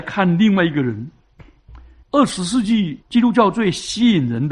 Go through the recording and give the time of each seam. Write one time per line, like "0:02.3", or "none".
0:02.0
0:03.0